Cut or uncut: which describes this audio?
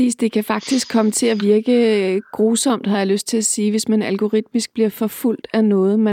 uncut